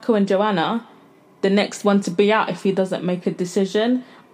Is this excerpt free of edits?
yes; 0 cuts

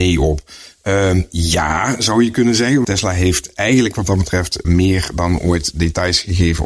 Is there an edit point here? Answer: yes; 2 cuts; at 2.8 s, 4.6 s

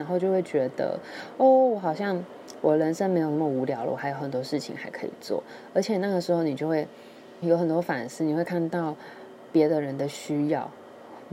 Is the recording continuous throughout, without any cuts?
no; 1 cut; at 7.4 s

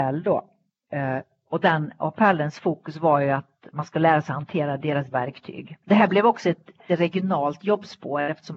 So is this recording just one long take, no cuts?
no; 3 cuts; at 5.1 s, 5.8 s, 6.9 s

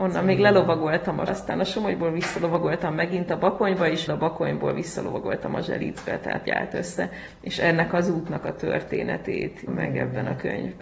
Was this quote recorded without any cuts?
no; 4 cuts; at 1.3 s, 4.1 s, 6.5 s, 9.7 s

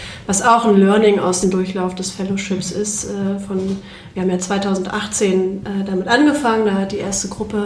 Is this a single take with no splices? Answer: no; 1 cut; at 1.4 s

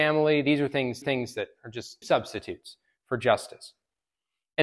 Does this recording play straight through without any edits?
no; 2 cuts; at 1.0 s, 2.0 s

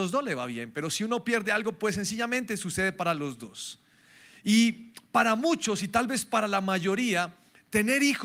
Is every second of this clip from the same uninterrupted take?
yes; 0 cuts

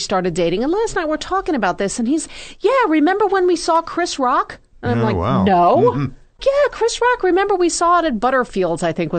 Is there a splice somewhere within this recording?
yes; 2 cuts; at 4.7 s, 6.3 s

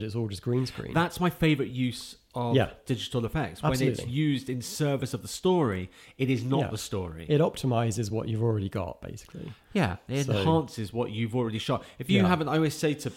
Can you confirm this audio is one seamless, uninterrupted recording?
yes; 0 cuts

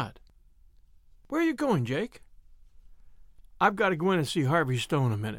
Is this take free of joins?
yes; 0 cuts

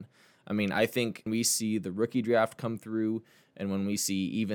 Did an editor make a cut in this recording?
yes; 1 cut; at 1.3 s

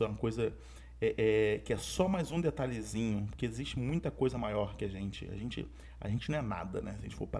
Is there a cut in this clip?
no; 0 cuts

